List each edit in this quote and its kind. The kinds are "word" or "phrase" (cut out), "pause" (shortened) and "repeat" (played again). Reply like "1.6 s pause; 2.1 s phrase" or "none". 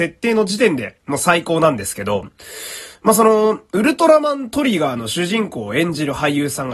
none